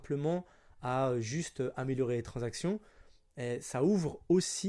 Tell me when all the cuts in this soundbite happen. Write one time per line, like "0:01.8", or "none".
none